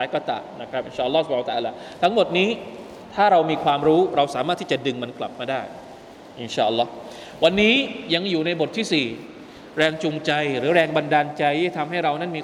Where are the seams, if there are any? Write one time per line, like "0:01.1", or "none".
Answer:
none